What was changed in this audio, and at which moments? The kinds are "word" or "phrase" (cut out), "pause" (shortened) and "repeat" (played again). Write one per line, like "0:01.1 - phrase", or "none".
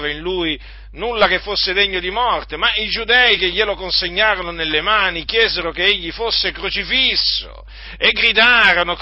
none